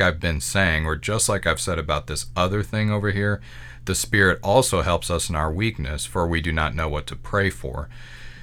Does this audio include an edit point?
no; 0 cuts

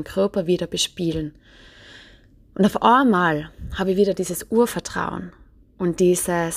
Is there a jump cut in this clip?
no; 0 cuts

